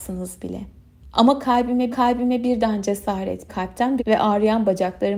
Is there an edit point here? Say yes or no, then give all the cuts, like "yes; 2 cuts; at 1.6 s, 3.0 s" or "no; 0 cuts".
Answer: yes; 3 cuts; at 1.9 s, 3.5 s, 4.0 s